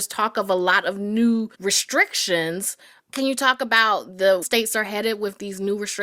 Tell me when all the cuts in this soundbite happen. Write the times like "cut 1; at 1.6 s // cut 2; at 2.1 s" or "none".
cut 1; at 1.5 s // cut 2; at 4.4 s